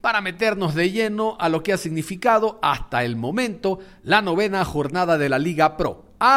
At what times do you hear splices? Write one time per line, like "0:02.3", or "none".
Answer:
none